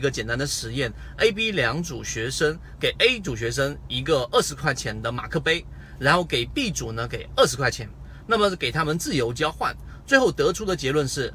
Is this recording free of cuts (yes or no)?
yes